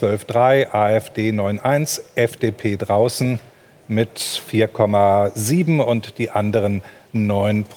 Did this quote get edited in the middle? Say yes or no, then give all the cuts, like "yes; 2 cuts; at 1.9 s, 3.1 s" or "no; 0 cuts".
no; 0 cuts